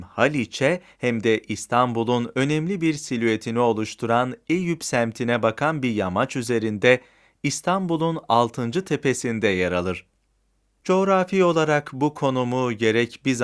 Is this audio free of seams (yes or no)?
yes